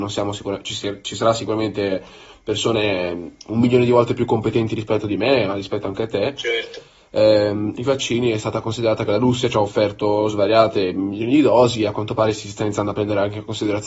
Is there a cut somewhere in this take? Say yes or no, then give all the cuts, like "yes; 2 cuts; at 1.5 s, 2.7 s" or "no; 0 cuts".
no; 0 cuts